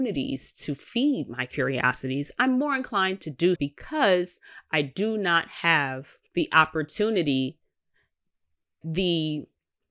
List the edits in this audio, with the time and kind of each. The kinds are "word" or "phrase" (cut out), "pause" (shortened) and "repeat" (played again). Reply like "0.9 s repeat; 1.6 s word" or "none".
3.6 s word; 6.3 s pause; 8.8 s word